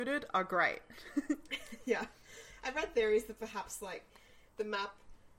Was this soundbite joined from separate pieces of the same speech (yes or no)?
no